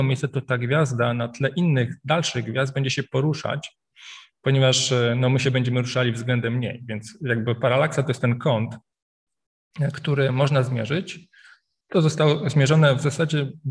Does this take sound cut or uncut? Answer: uncut